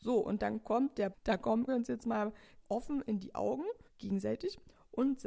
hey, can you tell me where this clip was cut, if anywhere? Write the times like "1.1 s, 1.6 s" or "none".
1.1 s, 1.7 s, 2.6 s, 3.9 s